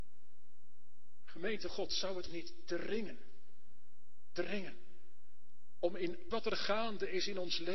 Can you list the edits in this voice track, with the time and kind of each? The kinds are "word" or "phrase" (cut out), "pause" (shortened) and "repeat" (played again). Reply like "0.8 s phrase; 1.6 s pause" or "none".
1.7 s word; 2.3 s word; 6.3 s word